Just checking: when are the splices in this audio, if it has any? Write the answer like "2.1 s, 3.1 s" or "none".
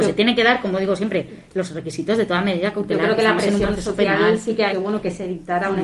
4.7 s